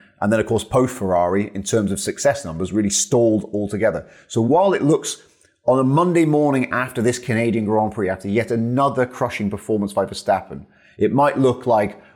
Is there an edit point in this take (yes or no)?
no